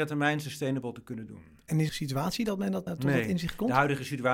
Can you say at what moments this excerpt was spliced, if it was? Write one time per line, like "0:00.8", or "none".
0:01.9
0:02.9